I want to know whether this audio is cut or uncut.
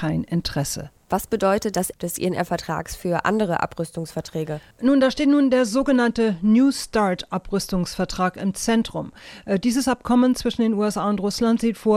cut